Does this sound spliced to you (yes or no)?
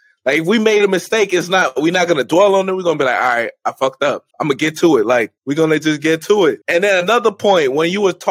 yes